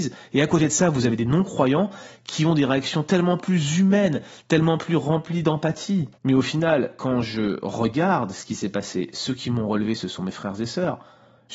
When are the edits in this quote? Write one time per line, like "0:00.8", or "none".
0:06.2